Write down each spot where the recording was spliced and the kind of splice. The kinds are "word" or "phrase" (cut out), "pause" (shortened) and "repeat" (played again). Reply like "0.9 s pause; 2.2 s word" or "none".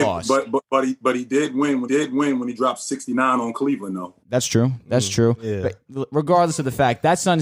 1.8 s repeat; 4.2 s pause